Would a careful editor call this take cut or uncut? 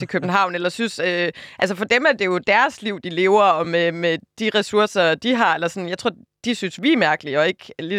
uncut